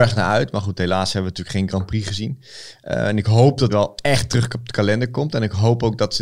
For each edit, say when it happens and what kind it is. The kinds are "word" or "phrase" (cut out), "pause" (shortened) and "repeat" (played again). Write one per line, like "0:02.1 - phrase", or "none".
0:03.7 - word